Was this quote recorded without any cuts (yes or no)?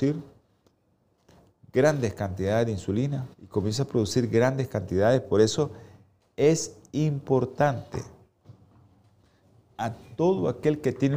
no